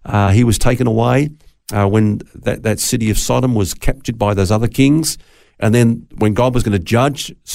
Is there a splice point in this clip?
no; 0 cuts

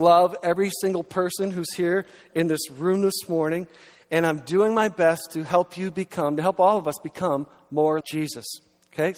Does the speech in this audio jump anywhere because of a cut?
yes; 1 cut; at 8.0 s

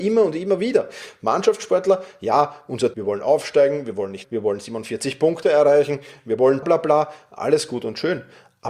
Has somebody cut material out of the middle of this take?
yes; 3 cuts; at 2.9 s, 4.2 s, 6.6 s

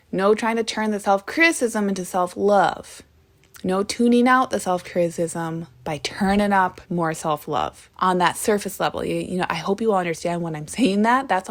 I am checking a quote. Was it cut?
yes; 4 cuts; at 3.2 s, 5.7 s, 6.8 s, 7.9 s

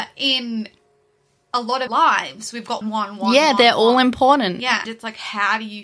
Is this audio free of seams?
no; 3 cuts; at 1.9 s, 2.8 s, 4.9 s

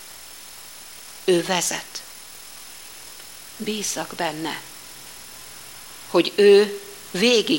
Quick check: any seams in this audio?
no; 0 cuts

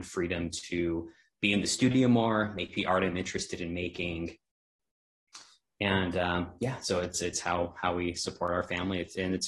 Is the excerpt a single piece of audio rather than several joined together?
yes; 0 cuts

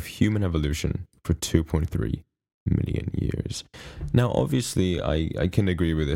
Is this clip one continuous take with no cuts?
yes; 0 cuts

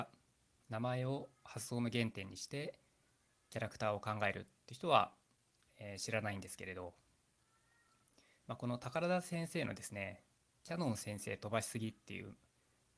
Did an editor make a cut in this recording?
no; 0 cuts

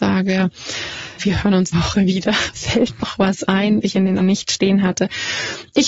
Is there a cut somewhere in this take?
yes; 5 cuts; at 1.2 s, 1.7 s, 3.0 s, 3.8 s, 4.2 s

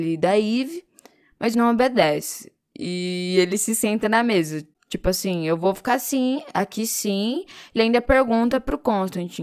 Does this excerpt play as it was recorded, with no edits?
no; 2 cuts; at 1.5 s, 7.8 s

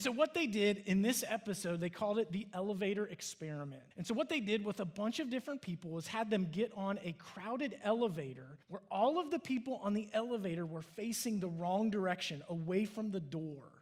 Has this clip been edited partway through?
yes; 2 cuts; at 3.9 s, 8.6 s

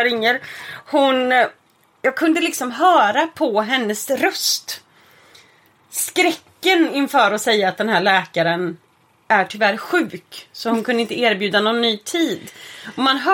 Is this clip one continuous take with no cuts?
yes; 0 cuts

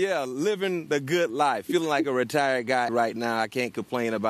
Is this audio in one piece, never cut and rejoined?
no; 1 cut; at 2.9 s

